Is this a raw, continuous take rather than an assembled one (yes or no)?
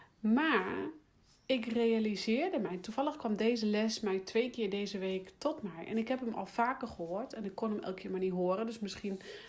yes